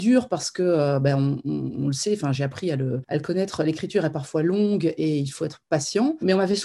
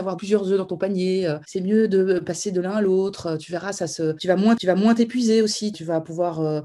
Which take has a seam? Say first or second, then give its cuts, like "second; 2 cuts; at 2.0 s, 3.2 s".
second; 1 cut; at 4.6 s